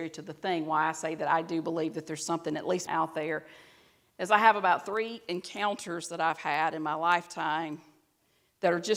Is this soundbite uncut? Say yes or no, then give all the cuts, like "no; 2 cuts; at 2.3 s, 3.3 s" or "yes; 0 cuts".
no; 1 cut; at 2.9 s